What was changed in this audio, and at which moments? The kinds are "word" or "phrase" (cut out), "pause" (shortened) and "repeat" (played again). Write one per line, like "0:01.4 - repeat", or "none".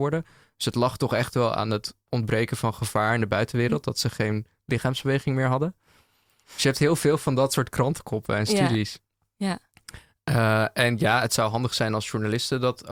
none

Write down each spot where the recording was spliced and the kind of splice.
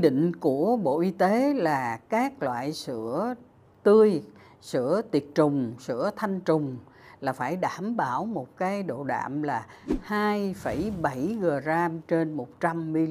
none

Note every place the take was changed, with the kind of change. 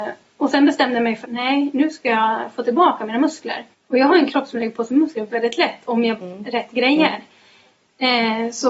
0:01.2 - word
0:03.7 - pause
0:05.3 - word
0:06.2 - phrase

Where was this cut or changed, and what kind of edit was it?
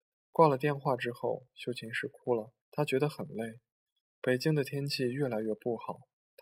0:02.6 - pause

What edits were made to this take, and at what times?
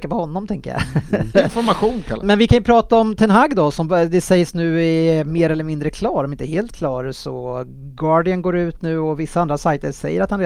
0:02.2 - word

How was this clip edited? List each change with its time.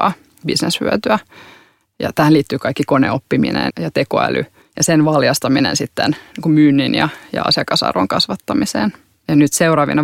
0:03.7 - word
0:04.6 - pause

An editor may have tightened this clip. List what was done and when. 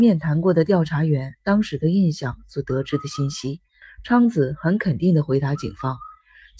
0:03.8 - pause

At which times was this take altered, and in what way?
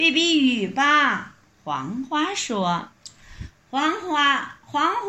0:01.4 - pause
0:02.9 - pause

